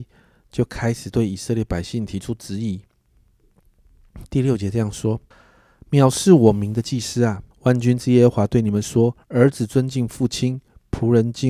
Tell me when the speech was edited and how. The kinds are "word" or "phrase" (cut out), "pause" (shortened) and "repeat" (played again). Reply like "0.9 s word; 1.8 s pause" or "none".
5.3 s pause; 7.5 s pause; 9.2 s pause